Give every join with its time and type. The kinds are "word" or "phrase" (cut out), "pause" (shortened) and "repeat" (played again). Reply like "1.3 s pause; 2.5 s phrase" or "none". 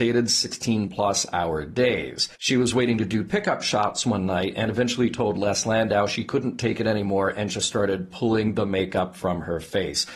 2.3 s pause